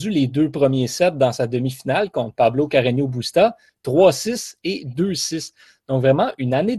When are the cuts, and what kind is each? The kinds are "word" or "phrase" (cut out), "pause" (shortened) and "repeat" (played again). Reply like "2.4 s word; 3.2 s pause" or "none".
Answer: none